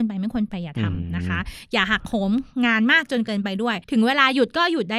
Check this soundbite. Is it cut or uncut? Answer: cut